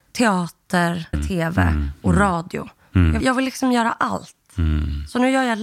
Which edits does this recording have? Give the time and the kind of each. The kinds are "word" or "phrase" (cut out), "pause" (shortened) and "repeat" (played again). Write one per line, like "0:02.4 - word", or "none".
0:01.1 - word
0:03.2 - word